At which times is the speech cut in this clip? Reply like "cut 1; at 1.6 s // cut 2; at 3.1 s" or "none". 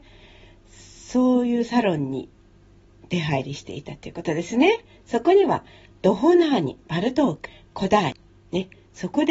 none